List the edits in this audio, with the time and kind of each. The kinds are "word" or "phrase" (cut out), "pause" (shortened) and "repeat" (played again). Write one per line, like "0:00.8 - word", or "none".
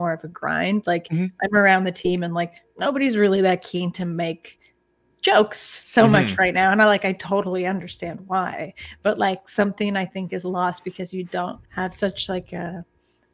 0:11.6 - pause